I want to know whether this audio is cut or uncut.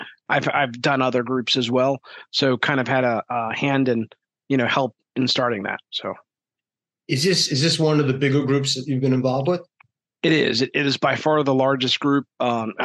uncut